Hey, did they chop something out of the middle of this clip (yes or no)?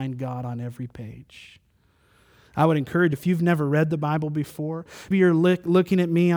yes